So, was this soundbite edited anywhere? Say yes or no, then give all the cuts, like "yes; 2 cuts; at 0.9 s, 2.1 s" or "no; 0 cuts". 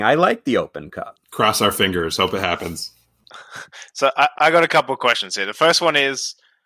yes; 2 cuts; at 1.2 s, 4.3 s